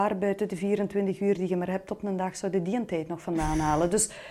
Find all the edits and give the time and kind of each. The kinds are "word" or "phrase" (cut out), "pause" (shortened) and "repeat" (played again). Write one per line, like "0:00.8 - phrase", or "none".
none